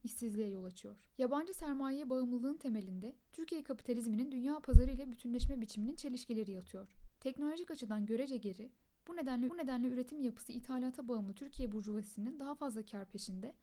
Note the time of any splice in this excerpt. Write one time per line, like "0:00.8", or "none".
0:01.1
0:07.2
0:09.5